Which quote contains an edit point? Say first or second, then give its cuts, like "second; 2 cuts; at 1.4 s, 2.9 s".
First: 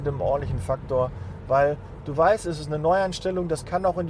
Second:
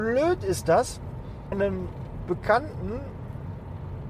second; 1 cut; at 1.5 s